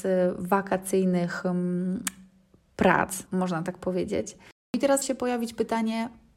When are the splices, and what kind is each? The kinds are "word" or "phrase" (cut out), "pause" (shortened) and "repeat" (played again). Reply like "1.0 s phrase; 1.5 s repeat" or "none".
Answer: 3.3 s word; 5.0 s word